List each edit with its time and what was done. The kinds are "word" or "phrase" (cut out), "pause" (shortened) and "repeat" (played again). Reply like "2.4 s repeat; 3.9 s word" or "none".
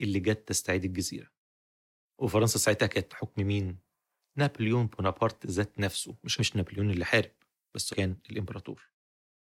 3.1 s word; 6.4 s phrase; 7.9 s word